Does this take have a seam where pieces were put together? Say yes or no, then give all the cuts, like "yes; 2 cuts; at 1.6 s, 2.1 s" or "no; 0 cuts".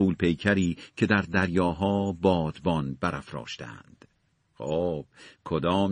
no; 0 cuts